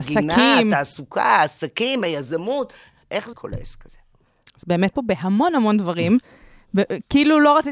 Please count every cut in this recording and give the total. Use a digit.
2